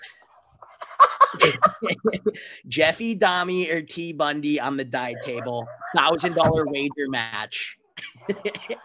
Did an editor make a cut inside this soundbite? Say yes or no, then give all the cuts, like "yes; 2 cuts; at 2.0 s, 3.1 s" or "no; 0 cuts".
no; 0 cuts